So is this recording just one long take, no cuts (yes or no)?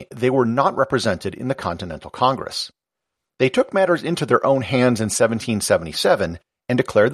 yes